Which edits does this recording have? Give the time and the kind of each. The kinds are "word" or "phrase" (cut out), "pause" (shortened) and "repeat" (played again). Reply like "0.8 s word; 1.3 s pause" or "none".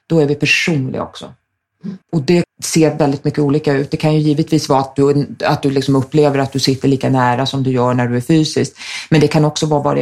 2.0 s pause; 2.4 s word